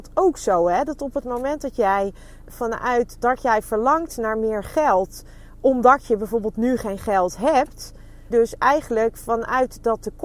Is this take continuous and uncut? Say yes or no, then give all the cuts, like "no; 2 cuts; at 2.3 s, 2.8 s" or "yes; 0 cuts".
no; 3 cuts; at 2.5 s, 3.2 s, 8.3 s